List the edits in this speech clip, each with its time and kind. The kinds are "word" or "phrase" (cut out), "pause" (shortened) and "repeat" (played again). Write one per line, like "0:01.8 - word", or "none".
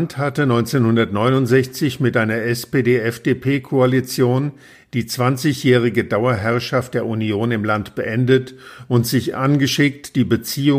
none